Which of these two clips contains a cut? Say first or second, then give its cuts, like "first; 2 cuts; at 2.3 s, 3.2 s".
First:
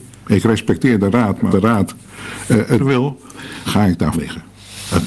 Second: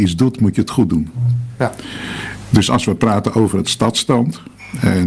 first; 4 cuts; at 1.5 s, 2.8 s, 3.6 s, 4.1 s